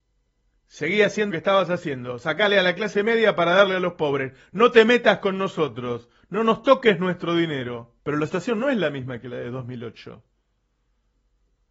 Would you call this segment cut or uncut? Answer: cut